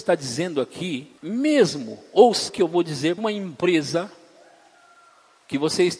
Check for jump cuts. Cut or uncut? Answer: cut